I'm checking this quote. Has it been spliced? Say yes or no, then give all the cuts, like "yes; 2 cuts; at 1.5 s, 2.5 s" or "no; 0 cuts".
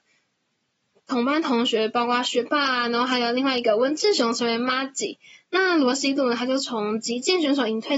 no; 0 cuts